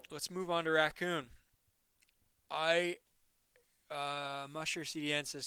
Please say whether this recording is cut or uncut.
uncut